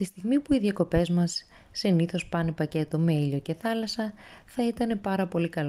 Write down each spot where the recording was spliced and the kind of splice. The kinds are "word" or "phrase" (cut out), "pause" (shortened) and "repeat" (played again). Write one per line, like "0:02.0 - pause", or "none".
none